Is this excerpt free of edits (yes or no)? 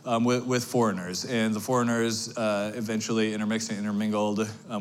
yes